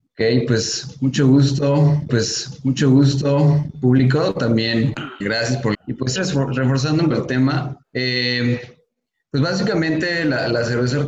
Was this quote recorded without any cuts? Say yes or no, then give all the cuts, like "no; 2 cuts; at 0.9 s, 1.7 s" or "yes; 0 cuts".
no; 6 cuts; at 2.1 s, 5.2 s, 5.7 s, 6.2 s, 7.1 s, 7.8 s